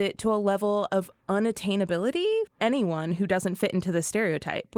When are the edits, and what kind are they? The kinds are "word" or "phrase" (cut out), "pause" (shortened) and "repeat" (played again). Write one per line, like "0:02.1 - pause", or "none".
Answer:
0:02.5 - word